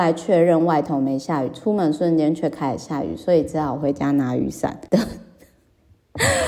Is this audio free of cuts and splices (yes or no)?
no